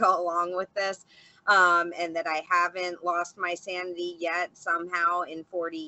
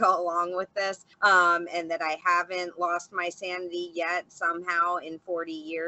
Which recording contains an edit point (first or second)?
second